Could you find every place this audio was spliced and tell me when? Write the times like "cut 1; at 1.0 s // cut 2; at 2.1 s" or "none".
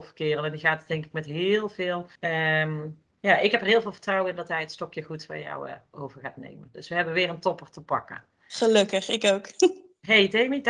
cut 1; at 2.2 s // cut 2; at 8.3 s